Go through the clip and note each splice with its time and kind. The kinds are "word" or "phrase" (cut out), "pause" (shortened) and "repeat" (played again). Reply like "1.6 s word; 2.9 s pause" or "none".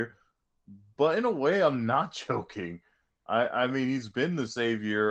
none